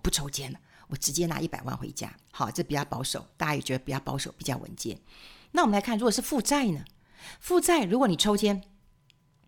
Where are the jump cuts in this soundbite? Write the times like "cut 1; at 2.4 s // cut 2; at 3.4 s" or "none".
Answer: cut 1; at 2.2 s